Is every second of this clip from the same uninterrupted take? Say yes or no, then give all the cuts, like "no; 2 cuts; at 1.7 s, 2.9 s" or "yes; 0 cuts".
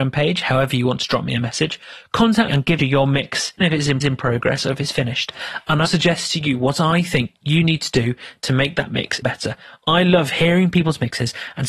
no; 6 cuts; at 2.5 s, 2.8 s, 3.6 s, 4.0 s, 5.9 s, 9.2 s